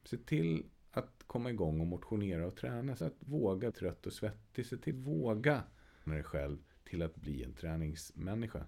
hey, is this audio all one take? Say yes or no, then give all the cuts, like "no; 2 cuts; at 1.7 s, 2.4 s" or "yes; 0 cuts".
no; 4 cuts; at 3.0 s, 3.7 s, 4.9 s, 6.1 s